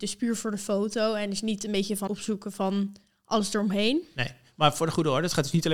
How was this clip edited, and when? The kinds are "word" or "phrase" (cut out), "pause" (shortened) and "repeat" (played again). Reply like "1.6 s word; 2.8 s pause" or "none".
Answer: 2.1 s word